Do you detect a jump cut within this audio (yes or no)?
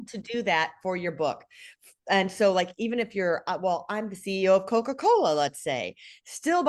no